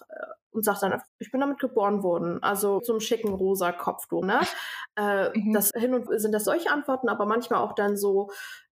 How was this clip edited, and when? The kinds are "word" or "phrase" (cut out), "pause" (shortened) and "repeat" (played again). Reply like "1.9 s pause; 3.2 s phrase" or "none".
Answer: 1.1 s word; 2.8 s word; 4.2 s word; 5.7 s word; 6.1 s word; 6.5 s word